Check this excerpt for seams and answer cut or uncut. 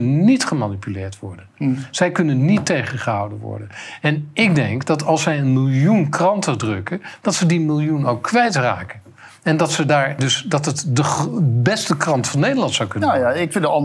uncut